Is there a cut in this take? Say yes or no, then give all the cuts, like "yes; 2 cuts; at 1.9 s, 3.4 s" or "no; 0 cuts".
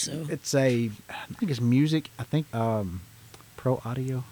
yes; 3 cuts; at 1.4 s, 2.5 s, 3.2 s